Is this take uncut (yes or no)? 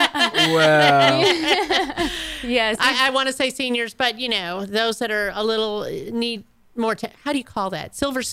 yes